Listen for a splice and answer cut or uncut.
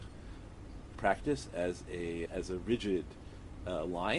cut